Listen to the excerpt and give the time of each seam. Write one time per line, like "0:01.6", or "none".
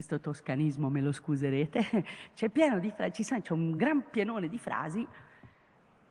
none